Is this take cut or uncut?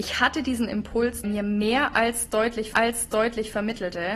cut